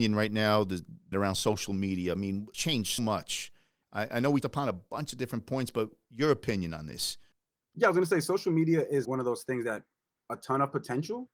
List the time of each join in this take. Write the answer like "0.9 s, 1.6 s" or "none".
1.1 s, 2.5 s, 3.0 s, 4.4 s, 9.0 s, 10.2 s